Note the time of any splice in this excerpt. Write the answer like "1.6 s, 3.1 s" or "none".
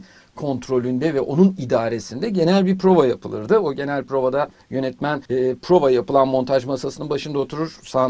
5.3 s